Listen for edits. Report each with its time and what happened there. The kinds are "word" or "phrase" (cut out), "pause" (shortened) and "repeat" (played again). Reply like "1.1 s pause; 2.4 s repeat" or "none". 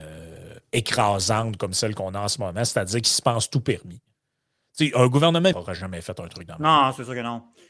5.5 s word